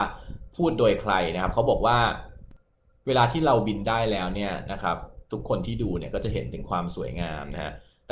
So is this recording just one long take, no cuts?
yes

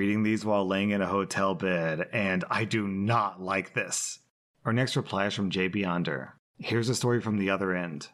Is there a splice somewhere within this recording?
no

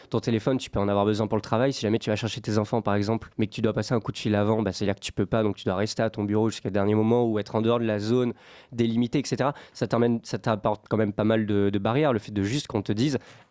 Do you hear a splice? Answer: yes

